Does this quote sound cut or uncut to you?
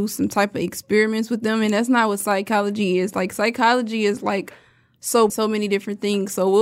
cut